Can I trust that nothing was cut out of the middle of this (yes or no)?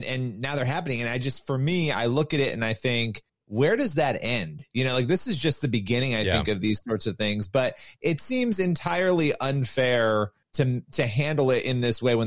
no